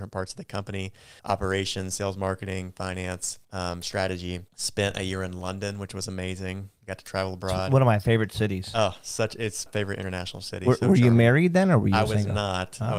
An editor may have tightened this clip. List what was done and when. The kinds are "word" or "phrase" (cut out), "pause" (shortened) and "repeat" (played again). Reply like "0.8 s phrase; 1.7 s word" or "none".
1.2 s pause; 3.4 s pause; 4.5 s pause; 9.7 s word